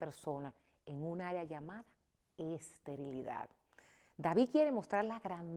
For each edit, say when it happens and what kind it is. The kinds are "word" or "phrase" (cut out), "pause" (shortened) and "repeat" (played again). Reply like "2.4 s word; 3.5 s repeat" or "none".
none